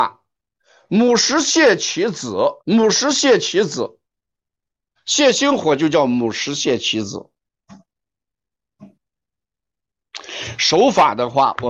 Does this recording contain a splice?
yes; 2 cuts; at 2.6 s, 5.0 s

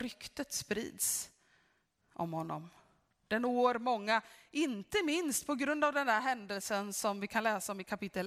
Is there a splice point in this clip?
no; 0 cuts

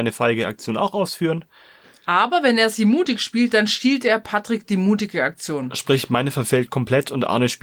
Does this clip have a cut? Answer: no; 0 cuts

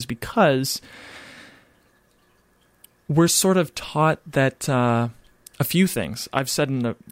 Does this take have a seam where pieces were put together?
no; 0 cuts

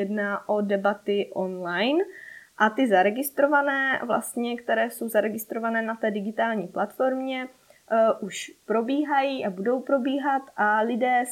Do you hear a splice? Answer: no; 0 cuts

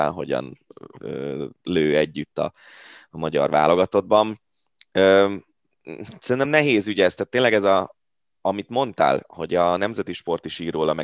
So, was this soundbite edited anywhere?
no; 0 cuts

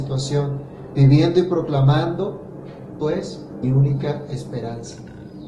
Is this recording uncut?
no; 2 cuts; at 3.0 s, 3.6 s

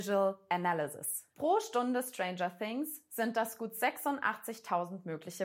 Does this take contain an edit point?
yes; 1 cut; at 1.3 s

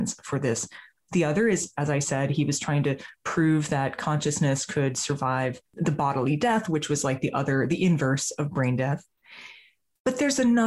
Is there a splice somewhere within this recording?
yes; 1 cut; at 5.7 s

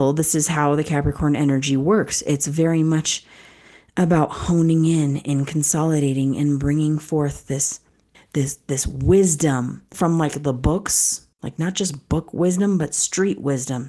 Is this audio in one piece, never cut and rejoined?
no; 3 cuts; at 8.1 s, 9.9 s, 11.3 s

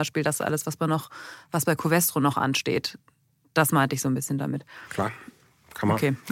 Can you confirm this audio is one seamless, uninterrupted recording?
yes; 0 cuts

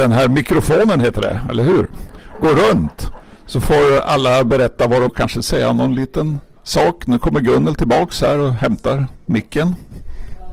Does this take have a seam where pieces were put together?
yes; 2 cuts; at 5.1 s, 6.6 s

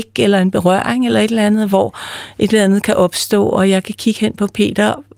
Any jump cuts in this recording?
no; 0 cuts

